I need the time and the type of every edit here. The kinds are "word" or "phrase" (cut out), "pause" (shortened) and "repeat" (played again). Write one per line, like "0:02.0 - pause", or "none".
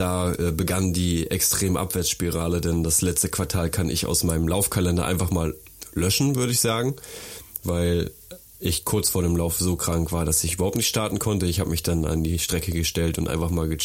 none

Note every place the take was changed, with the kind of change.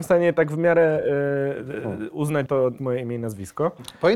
0:02.5 - word
0:02.8 - word

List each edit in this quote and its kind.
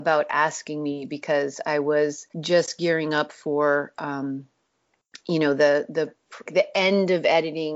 0:02.3 - pause
0:06.5 - word

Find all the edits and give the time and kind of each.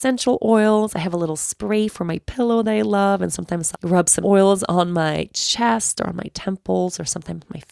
0:03.7 - word
0:04.2 - word

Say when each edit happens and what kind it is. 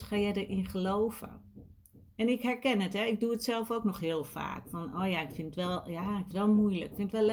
0:06.3 - word

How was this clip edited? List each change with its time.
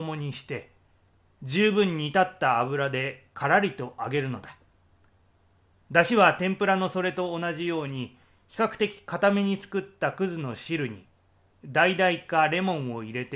none

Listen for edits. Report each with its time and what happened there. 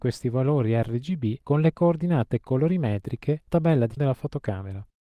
0:03.5 - word
0:04.0 - word

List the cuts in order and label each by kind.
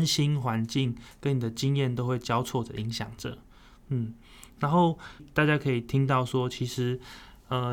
none

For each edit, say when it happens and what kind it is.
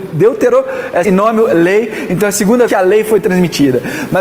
0:01.0 - phrase
0:02.7 - word

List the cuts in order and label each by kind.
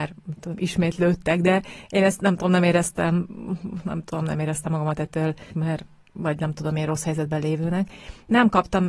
0:05.5 - word

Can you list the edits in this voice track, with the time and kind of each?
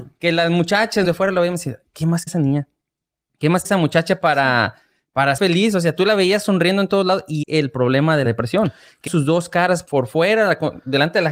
0:01.0 - word
0:02.3 - word
0:03.6 - word
0:05.4 - word
0:07.4 - word
0:08.2 - word
0:09.1 - word
0:09.9 - word

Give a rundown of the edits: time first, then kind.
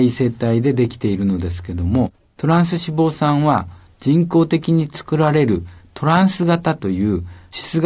none

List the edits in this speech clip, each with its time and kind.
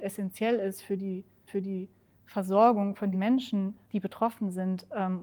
0:01.5 - repeat
0:03.1 - word
0:03.8 - pause

